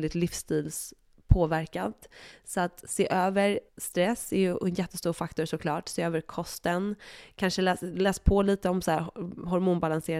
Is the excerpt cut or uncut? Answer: cut